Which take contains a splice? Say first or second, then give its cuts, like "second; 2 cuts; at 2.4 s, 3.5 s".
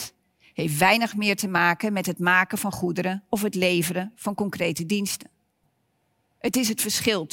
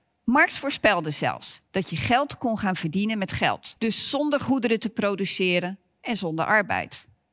second; 1 cut; at 3.8 s